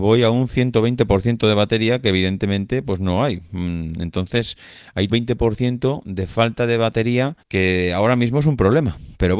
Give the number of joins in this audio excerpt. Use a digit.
2